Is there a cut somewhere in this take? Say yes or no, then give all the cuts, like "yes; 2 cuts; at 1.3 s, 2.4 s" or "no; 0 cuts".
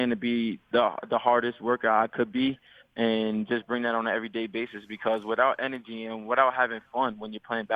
no; 0 cuts